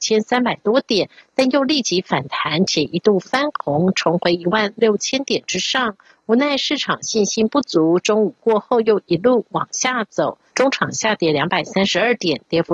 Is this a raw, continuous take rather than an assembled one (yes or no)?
no